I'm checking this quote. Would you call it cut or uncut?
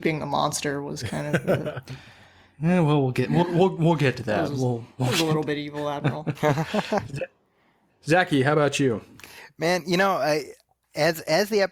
uncut